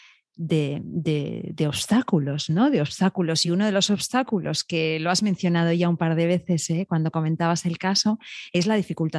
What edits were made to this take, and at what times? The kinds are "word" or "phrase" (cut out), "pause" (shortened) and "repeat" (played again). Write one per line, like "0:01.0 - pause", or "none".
none